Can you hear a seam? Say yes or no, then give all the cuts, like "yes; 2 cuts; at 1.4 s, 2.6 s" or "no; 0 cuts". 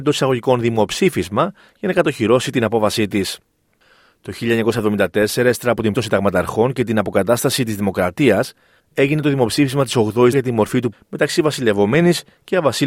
yes; 3 cuts; at 5.9 s, 10.3 s, 10.9 s